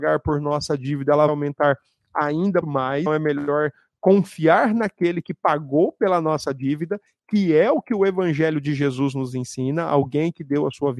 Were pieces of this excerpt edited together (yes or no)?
yes